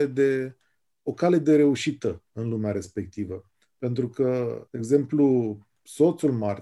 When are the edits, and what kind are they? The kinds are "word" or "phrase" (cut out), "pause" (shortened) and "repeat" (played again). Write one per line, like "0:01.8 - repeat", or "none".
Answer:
0:04.7 - pause